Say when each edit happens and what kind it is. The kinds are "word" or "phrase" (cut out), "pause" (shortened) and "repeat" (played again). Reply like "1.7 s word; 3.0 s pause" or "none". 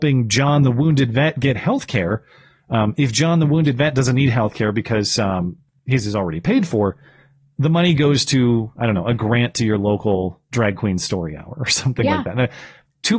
none